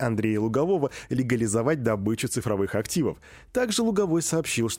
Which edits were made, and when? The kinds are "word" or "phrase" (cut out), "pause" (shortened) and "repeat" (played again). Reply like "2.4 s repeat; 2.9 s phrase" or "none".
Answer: none